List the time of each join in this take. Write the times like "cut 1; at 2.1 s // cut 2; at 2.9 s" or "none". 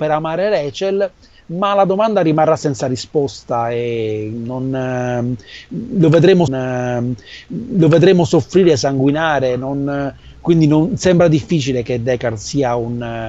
cut 1; at 6.5 s